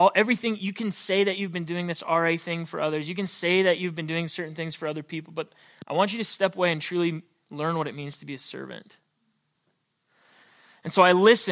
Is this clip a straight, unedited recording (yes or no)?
yes